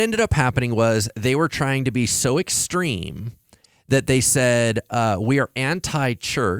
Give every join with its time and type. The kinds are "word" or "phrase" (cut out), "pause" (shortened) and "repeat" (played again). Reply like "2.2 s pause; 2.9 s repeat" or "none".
none